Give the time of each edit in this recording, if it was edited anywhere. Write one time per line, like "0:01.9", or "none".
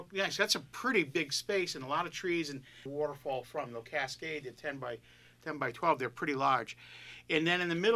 0:02.9

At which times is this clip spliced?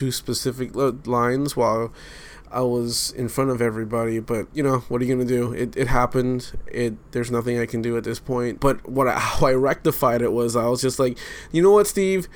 none

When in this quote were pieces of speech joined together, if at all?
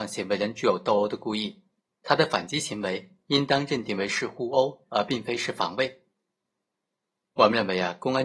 none

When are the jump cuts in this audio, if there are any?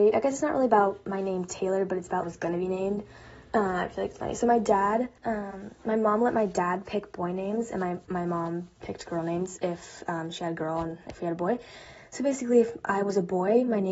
0:02.2
0:04.2
0:05.2
0:08.0

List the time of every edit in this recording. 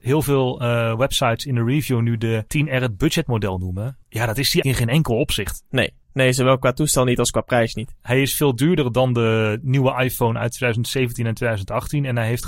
0:02.5
0:04.0
0:04.6

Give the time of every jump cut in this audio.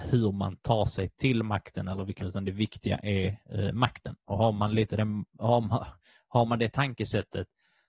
0:02.2

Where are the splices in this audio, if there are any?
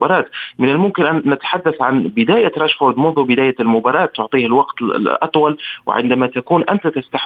none

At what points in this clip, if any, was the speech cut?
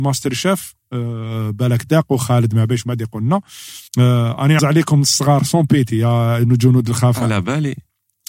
0:03.9
0:04.6

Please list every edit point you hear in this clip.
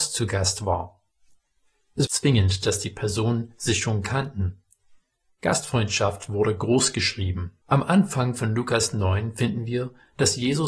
0:02.1
0:07.6

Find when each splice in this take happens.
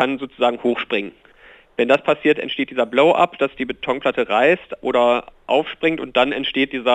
none

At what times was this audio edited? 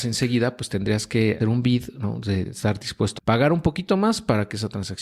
0:01.4
0:02.4
0:03.2

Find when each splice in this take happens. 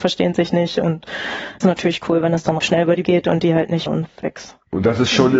0:01.6
0:02.6
0:03.0
0:03.9

